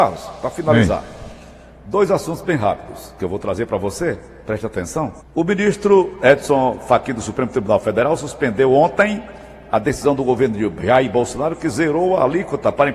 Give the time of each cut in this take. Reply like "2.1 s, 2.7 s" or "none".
5.2 s